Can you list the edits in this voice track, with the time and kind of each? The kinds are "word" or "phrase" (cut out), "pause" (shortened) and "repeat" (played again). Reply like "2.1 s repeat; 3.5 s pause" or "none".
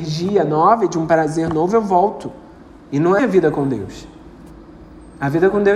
3.2 s word